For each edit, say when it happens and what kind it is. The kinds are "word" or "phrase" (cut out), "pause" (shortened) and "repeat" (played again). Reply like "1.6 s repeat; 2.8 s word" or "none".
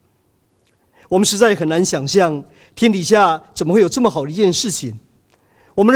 none